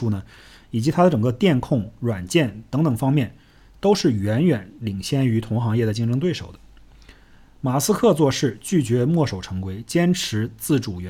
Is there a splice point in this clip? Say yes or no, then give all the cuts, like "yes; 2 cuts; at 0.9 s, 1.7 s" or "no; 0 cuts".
no; 0 cuts